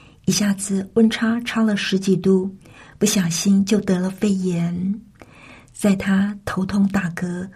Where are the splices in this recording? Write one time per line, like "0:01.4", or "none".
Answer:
none